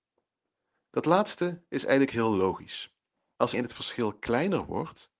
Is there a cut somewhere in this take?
yes; 1 cut; at 3.5 s

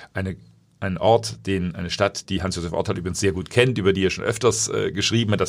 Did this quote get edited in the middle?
no; 0 cuts

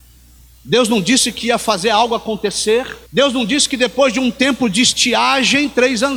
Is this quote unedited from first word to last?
no; 1 cut; at 3.1 s

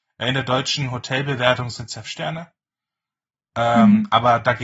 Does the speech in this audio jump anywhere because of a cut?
yes; 1 cut; at 2.0 s

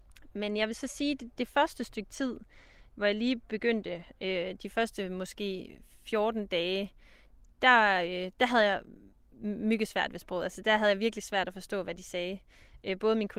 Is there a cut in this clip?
no; 0 cuts

